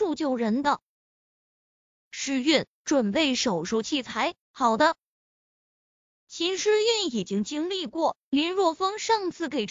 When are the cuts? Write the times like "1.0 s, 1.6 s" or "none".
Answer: 4.4 s